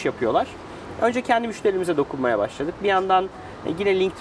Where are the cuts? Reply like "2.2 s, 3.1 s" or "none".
none